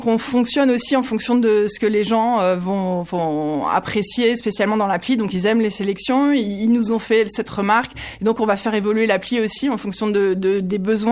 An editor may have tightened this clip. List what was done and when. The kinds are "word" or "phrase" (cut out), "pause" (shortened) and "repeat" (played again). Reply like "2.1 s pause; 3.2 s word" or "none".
none